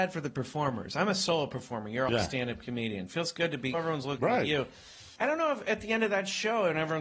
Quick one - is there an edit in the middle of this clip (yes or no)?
yes